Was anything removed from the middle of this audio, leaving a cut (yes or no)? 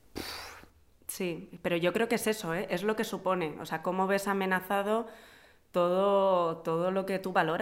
no